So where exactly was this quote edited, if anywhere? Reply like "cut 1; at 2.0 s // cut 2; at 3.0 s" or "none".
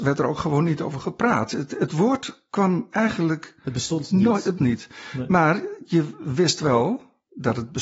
cut 1; at 4.6 s